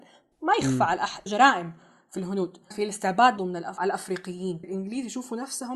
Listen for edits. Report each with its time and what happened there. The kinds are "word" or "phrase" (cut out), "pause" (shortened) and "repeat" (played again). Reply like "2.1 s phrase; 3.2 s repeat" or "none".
1.3 s word; 2.7 s word; 3.4 s word; 4.6 s word